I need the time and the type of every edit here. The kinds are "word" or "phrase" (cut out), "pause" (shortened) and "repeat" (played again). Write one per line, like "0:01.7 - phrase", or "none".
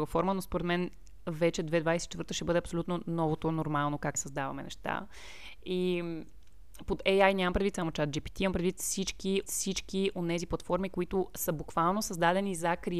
0:04.1 - word
0:09.4 - repeat

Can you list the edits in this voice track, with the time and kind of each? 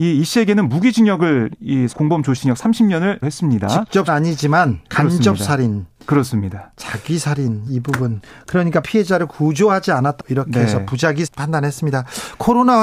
0:01.9 - word
0:02.4 - word
0:03.2 - word
0:04.1 - word
0:04.8 - word
0:07.7 - word
0:08.8 - word
0:10.2 - word
0:11.3 - word

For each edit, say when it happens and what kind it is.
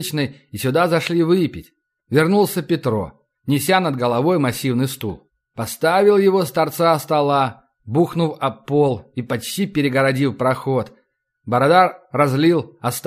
none

